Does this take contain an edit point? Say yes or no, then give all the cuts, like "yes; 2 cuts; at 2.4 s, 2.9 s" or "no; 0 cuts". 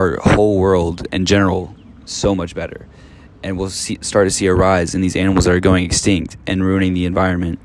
no; 0 cuts